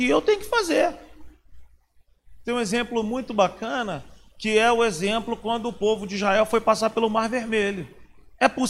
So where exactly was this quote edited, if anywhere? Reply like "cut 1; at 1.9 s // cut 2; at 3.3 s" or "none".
none